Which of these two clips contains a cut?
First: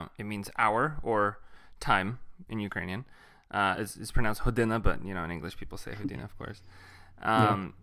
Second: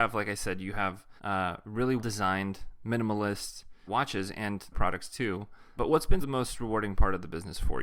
second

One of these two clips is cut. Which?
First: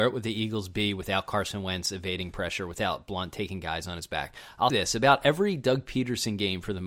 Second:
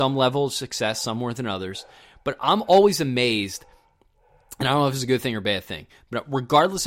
first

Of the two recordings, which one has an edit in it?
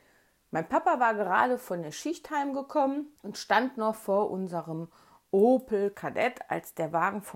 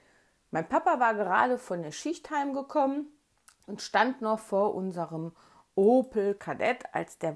first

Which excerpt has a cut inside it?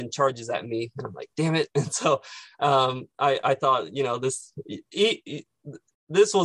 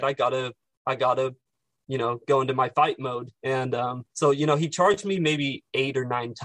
second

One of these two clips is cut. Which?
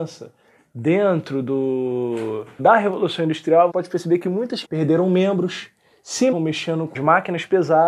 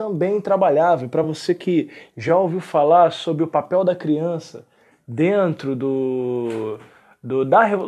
first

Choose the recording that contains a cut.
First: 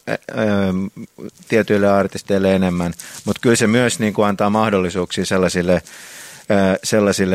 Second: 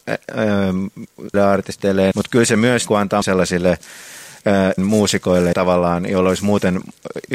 second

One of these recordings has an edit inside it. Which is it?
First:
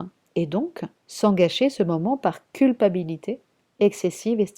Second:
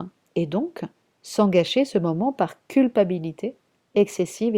first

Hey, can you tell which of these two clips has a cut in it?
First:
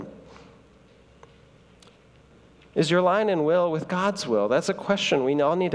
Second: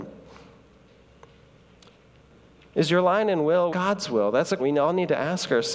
second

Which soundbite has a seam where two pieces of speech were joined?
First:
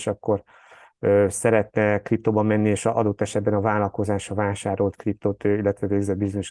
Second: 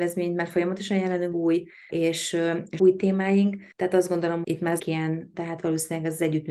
second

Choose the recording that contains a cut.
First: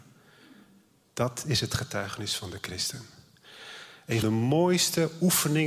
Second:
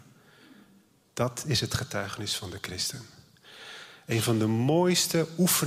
first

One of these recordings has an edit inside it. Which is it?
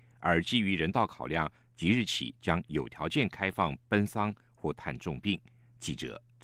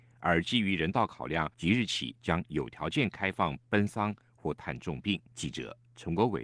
second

